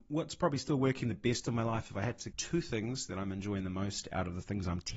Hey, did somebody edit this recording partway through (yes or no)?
yes